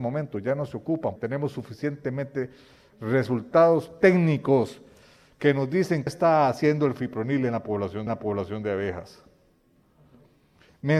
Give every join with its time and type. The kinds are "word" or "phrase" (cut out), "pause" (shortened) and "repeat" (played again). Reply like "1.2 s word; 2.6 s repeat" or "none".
1.2 s word; 6.1 s word; 8.1 s repeat